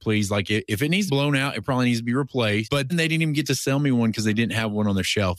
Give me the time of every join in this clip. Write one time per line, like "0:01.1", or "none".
0:01.1
0:02.9